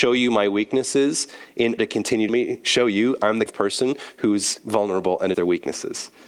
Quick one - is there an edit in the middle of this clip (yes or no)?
yes